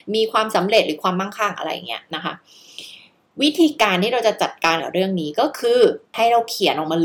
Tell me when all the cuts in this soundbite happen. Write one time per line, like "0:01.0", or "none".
0:06.1